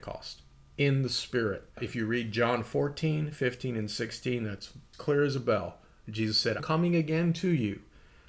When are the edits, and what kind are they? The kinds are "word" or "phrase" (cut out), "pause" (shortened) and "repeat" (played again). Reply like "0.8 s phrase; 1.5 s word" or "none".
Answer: 4.9 s word; 6.6 s word